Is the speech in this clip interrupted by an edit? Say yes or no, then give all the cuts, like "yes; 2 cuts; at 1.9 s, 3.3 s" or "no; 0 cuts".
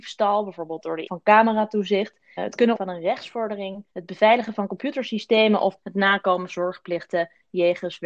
yes; 6 cuts; at 1.1 s, 2.4 s, 2.7 s, 3.9 s, 5.8 s, 6.5 s